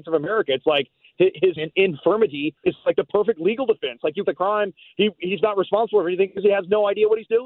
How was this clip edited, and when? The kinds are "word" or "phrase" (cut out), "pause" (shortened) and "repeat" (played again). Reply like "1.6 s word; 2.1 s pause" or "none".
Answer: 1.6 s phrase; 2.6 s word; 4.3 s phrase